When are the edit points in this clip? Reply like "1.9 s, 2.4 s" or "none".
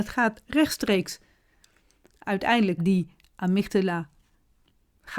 2.8 s